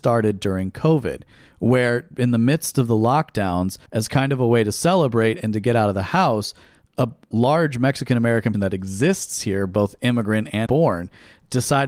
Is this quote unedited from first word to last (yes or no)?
no